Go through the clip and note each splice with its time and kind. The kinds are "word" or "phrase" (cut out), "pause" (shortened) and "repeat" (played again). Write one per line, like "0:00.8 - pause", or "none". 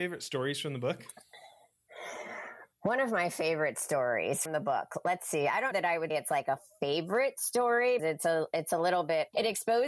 0:04.5 - word
0:05.7 - word
0:06.1 - word
0:08.0 - word